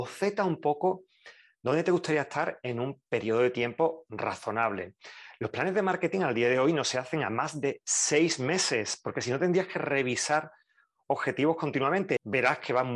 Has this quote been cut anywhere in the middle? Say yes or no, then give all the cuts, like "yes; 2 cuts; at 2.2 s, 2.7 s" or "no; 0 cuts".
no; 0 cuts